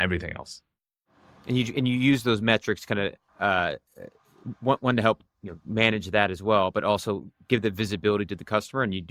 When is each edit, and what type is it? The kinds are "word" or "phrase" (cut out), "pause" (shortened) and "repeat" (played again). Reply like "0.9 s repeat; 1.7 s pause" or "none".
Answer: 3.3 s pause